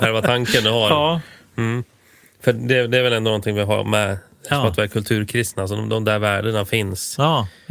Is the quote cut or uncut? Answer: uncut